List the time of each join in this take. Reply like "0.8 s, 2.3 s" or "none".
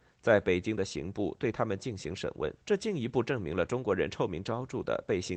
2.6 s